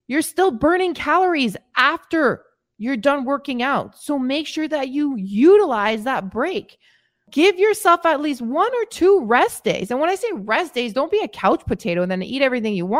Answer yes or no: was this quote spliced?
no